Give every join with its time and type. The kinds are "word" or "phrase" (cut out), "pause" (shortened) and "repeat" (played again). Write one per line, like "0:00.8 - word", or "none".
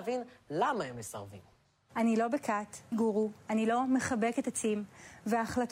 0:02.9 - phrase